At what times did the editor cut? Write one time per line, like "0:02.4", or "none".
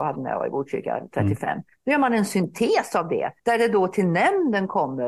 0:03.4